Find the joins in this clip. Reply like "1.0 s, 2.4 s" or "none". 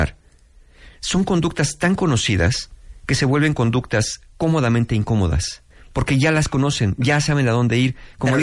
4.3 s, 5.7 s